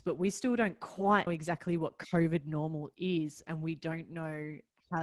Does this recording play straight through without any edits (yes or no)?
no